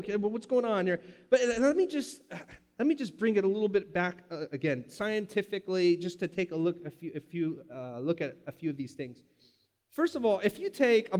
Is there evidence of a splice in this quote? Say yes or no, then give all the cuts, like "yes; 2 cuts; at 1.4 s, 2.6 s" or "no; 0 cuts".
no; 0 cuts